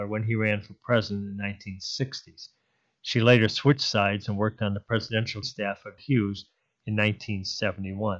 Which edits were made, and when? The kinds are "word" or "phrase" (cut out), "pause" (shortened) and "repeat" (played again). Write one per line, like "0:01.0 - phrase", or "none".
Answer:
0:05.4 - word
0:06.0 - phrase